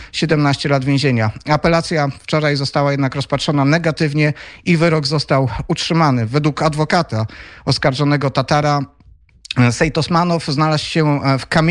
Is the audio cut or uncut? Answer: uncut